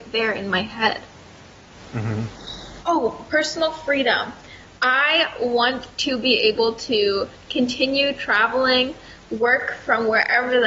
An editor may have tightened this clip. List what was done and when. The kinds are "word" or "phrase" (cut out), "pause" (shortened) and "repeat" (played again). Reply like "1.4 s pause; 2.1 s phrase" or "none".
none

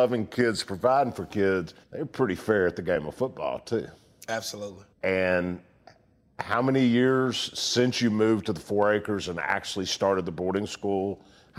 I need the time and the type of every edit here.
1.8 s pause; 4.9 s pause

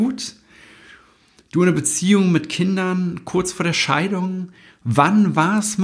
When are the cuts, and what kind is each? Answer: none

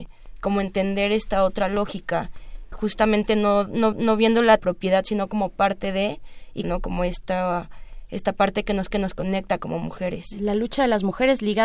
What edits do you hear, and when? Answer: 2.7 s word; 3.9 s repeat; 4.6 s phrase; 6.6 s phrase; 8.9 s repeat

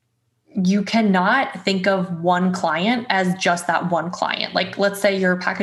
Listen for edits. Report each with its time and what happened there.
none

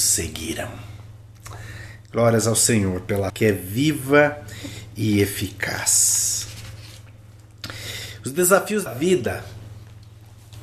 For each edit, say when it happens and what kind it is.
3.3 s phrase; 8.9 s word

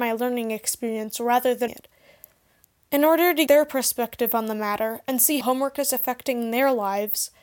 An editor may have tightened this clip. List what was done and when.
1.7 s word; 3.5 s word; 5.4 s word

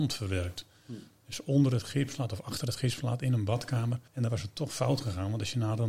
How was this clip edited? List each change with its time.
4.1 s pause

